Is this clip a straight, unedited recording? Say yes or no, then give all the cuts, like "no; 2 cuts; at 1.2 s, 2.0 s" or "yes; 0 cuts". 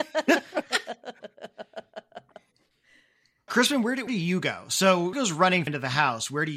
no; 4 cuts; at 3.5 s, 4.1 s, 5.1 s, 5.7 s